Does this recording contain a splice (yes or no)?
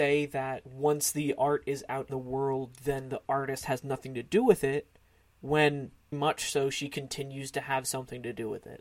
yes